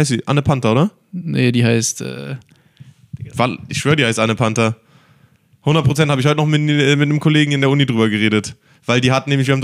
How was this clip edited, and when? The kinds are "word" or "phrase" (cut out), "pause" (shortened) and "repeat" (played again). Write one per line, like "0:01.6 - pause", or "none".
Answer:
none